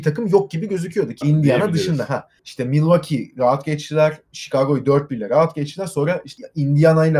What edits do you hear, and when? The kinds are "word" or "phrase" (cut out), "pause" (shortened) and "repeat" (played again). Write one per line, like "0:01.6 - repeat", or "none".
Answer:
0:01.2 - phrase